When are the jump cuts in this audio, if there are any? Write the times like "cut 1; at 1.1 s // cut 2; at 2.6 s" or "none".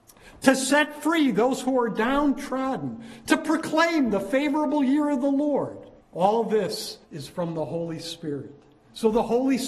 cut 1; at 6.0 s // cut 2; at 7.0 s